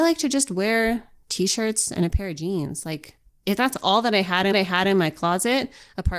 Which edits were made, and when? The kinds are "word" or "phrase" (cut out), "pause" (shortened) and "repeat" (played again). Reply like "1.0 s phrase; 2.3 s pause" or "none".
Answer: 4.5 s repeat